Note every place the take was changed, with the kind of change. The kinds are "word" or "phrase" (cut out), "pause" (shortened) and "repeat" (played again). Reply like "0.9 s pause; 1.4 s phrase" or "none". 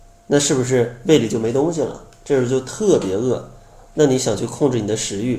none